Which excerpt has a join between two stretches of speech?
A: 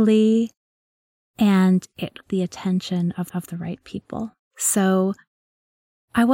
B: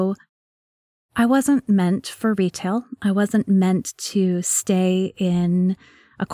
A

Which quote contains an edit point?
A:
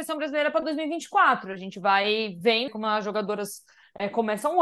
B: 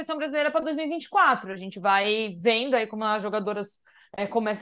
A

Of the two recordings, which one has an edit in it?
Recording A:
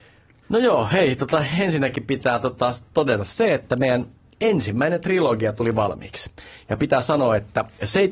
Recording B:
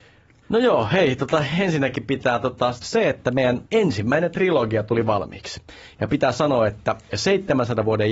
B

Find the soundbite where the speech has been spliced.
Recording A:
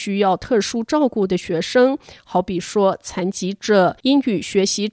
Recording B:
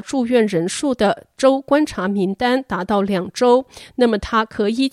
A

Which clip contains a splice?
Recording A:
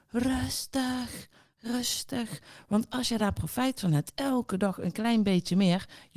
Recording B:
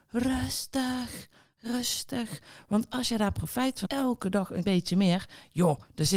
B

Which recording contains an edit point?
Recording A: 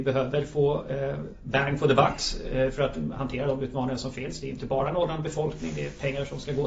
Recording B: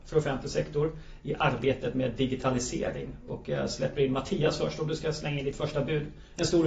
A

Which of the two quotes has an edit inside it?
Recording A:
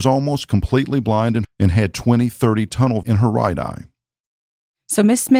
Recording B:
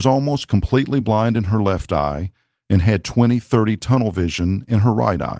A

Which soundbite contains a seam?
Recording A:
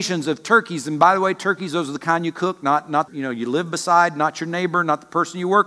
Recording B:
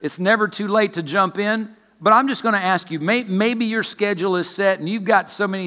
A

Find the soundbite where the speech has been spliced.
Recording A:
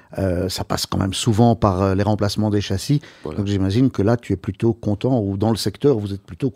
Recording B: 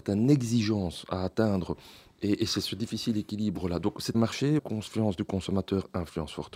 B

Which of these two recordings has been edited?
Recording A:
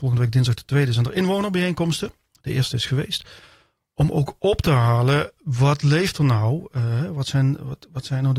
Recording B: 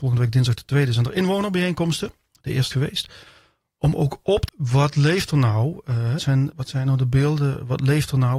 B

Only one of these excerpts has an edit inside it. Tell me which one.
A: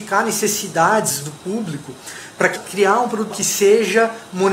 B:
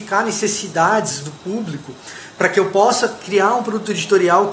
A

